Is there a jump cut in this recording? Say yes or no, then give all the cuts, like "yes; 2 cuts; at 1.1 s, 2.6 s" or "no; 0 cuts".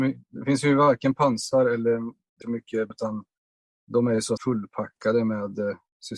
yes; 3 cuts; at 2.4 s, 2.9 s, 4.4 s